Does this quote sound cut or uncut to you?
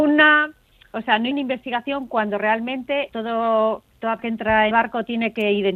cut